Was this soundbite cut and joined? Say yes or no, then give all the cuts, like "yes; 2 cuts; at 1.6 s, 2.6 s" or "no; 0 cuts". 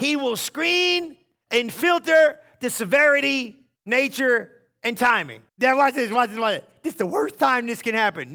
yes; 2 cuts; at 3.8 s, 5.5 s